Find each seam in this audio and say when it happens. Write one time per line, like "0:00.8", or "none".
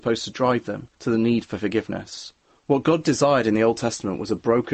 0:00.9
0:02.4